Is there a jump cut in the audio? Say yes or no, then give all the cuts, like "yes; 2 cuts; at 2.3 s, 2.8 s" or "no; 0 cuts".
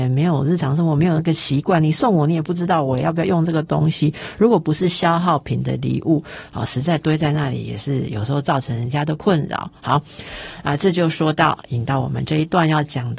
no; 0 cuts